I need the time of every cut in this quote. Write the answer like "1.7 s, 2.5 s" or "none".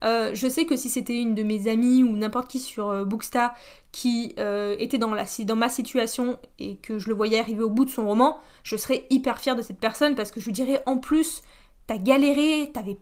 none